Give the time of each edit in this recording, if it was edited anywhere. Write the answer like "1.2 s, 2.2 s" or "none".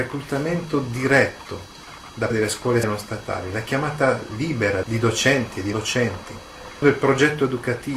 2.3 s, 2.8 s, 4.8 s, 5.7 s, 6.8 s